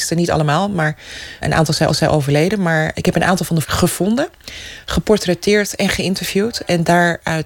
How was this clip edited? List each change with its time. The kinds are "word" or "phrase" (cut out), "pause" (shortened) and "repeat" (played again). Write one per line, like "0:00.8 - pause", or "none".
0:01.4 - word
0:01.9 - repeat
0:02.9 - word
0:03.6 - word